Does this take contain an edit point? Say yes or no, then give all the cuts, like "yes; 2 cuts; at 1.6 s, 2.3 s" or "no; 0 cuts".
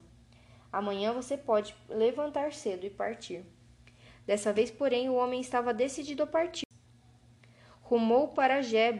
no; 0 cuts